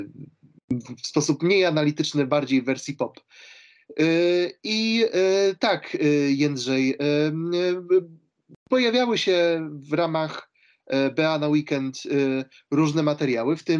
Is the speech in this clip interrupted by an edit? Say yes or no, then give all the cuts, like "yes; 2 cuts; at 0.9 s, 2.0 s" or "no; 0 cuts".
no; 0 cuts